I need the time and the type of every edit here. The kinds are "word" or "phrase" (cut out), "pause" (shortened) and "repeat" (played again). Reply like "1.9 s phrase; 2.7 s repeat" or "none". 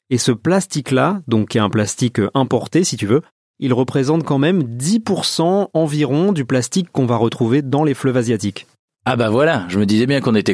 none

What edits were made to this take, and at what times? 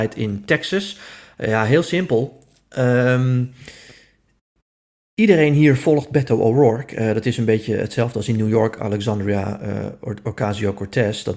none

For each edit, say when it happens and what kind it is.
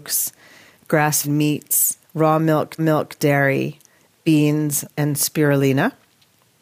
1.2 s word; 2.0 s pause; 2.8 s repeat; 4.9 s word

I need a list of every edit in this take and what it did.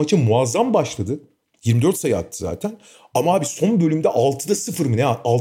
none

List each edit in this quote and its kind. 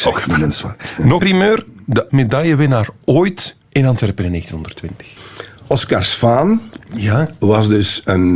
1.2 s word; 2.1 s word; 3.6 s pause

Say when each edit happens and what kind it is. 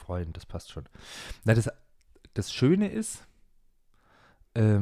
none

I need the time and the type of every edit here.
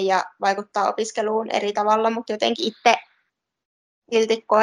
none

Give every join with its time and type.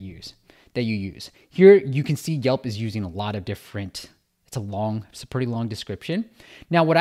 none

